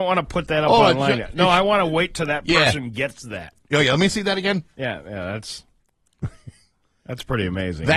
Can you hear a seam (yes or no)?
no